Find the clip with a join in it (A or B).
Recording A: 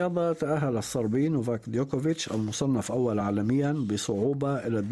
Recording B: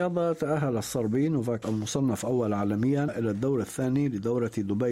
B